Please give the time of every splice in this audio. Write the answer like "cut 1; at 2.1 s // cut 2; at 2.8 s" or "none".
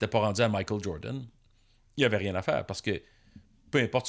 none